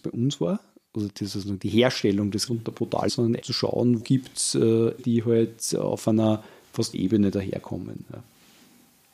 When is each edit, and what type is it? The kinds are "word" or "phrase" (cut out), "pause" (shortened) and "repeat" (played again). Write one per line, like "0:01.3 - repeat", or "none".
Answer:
0:02.5 - word
0:03.1 - word
0:03.4 - word
0:04.0 - word
0:05.0 - word
0:06.9 - word